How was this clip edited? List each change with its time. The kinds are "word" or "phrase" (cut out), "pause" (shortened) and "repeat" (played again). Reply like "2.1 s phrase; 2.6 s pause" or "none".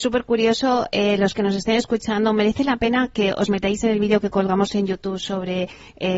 none